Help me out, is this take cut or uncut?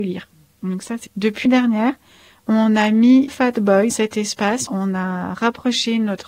cut